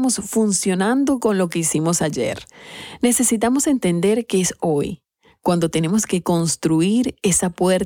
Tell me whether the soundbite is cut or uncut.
uncut